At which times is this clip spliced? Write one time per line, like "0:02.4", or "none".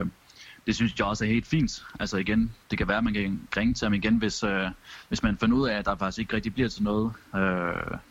0:02.6